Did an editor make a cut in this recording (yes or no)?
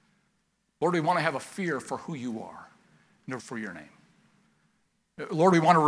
yes